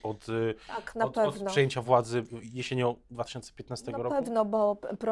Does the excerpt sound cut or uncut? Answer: uncut